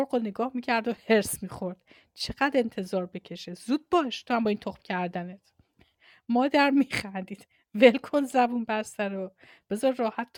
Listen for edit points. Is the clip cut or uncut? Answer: uncut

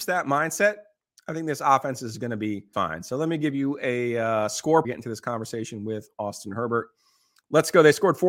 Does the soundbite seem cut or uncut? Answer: cut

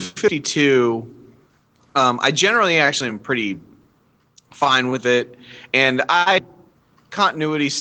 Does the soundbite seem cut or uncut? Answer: uncut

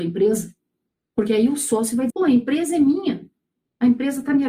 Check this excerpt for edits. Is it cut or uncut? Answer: cut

